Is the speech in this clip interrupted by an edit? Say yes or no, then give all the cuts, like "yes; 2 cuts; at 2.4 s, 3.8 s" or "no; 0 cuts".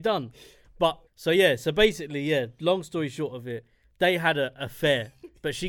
yes; 1 cut; at 1.1 s